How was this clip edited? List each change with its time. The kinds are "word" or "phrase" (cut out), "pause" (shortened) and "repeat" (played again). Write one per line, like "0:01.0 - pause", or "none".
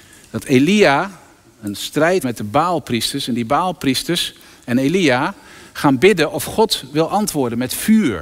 0:02.2 - word